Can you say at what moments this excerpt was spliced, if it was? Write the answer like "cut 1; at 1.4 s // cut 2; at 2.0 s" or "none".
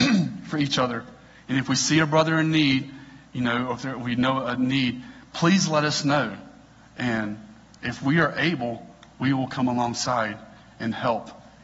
none